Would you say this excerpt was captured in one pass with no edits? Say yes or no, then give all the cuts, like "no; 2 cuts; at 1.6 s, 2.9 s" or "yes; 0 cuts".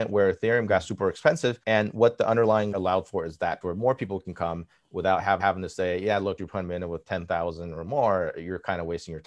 no; 5 cuts; at 1.6 s, 2.7 s, 3.6 s, 5.4 s, 6.4 s